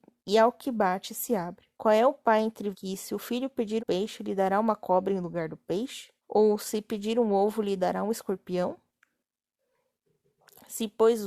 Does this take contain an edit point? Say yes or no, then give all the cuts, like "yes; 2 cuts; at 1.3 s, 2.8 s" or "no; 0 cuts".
yes; 4 cuts; at 1.7 s, 2.7 s, 3.8 s, 6.2 s